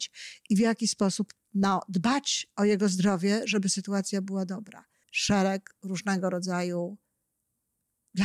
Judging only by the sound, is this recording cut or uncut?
cut